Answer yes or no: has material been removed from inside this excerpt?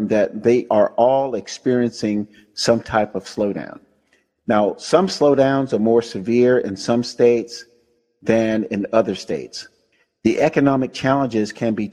no